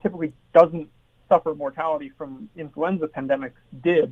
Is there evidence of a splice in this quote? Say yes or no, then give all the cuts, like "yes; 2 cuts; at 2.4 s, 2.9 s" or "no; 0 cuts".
no; 0 cuts